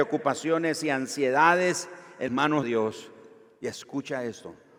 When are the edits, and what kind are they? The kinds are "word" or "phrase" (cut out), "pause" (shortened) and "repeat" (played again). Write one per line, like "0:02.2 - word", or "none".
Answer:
0:02.3 - word
0:02.6 - word